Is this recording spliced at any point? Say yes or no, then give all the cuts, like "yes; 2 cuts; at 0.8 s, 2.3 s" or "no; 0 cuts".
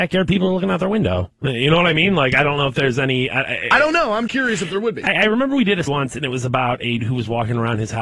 yes; 3 cuts; at 4.3 s, 5.9 s, 7.0 s